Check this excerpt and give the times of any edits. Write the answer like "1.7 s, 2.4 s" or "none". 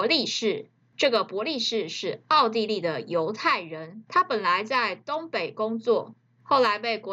none

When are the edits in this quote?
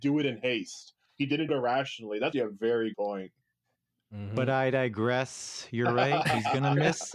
1.5 s, 2.3 s, 2.9 s

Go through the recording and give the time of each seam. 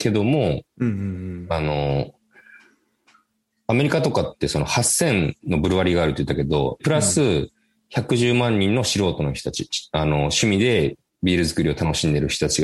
6.8 s

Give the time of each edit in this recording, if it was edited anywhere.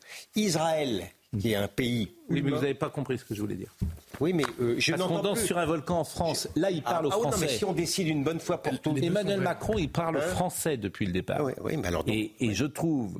none

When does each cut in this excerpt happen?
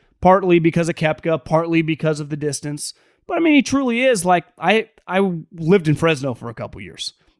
none

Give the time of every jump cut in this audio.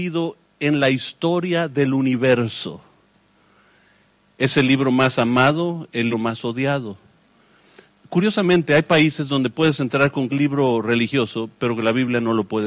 6.1 s, 10.3 s

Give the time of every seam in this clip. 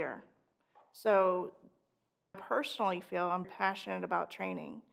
2.3 s, 3.4 s

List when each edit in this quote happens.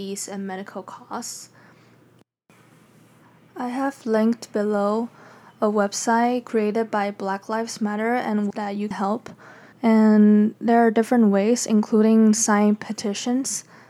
8.5 s, 8.9 s, 9.7 s

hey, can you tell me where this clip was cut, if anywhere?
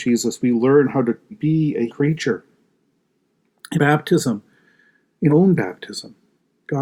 1.3 s, 1.9 s, 3.8 s, 5.3 s

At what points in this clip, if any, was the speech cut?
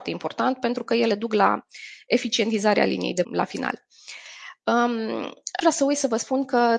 3.2 s, 5.6 s

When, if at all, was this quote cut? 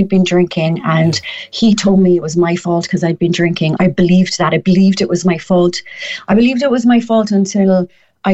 3.8 s

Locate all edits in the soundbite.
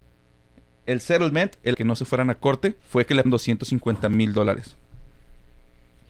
1.7 s, 2.8 s, 3.3 s

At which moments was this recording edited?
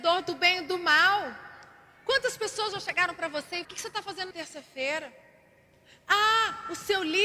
3.6 s, 4.3 s

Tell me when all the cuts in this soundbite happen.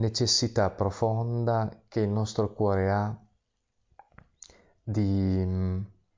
none

